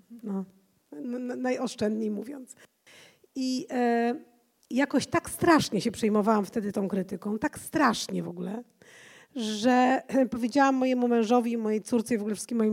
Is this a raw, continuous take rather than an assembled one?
yes; 0 cuts

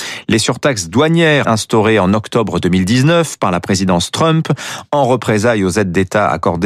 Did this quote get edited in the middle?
yes; 1 cut; at 1.4 s

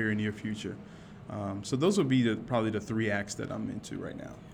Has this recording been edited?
no; 0 cuts

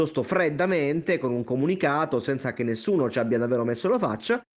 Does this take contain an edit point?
no; 0 cuts

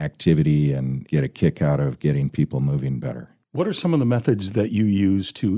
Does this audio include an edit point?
yes; 2 cuts; at 1.1 s, 3.4 s

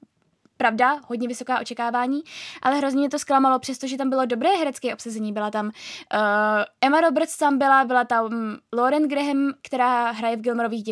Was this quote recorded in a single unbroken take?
yes; 0 cuts

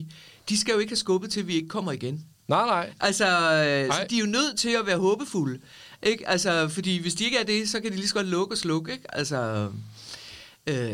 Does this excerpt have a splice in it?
yes; 1 cut; at 2.3 s

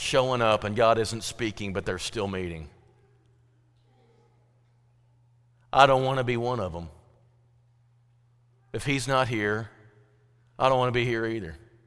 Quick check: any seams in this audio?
no; 0 cuts

